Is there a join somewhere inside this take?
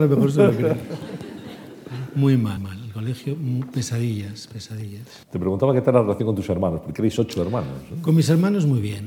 yes; 2 cuts; at 2.6 s, 5.2 s

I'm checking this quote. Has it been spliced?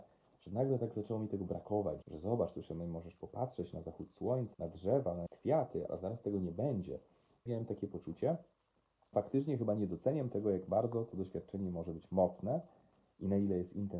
yes; 6 cuts; at 2.0 s, 4.5 s, 5.3 s, 5.9 s, 7.5 s, 9.1 s

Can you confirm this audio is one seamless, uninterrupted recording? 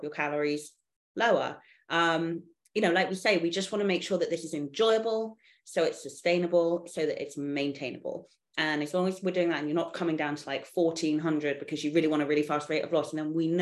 yes; 0 cuts

